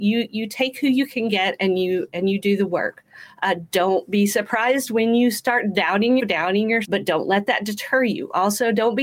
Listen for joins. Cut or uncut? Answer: cut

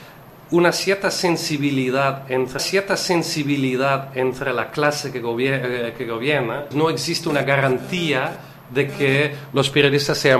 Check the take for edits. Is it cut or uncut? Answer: cut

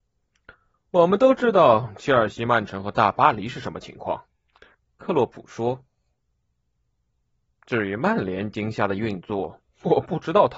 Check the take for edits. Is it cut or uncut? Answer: uncut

